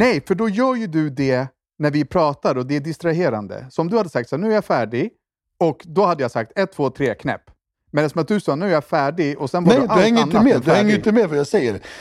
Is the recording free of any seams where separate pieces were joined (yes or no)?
yes